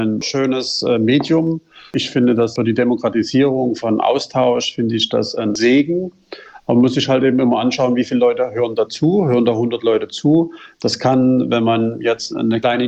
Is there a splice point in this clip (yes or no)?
no